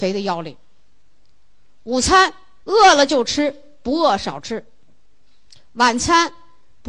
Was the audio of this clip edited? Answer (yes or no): yes